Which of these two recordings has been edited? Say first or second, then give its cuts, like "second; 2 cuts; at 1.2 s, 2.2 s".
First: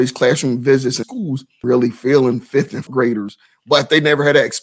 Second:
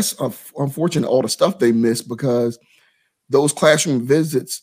first; 3 cuts; at 1.0 s, 1.6 s, 2.9 s